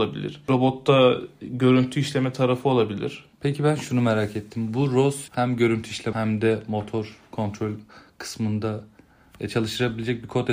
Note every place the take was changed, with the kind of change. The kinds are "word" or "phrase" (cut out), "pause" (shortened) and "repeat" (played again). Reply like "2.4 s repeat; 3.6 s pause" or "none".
3.3 s pause; 5.3 s word; 6.1 s word